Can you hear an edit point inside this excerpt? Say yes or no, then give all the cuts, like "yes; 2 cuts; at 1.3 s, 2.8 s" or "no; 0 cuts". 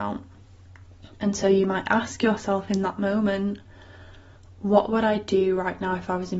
no; 0 cuts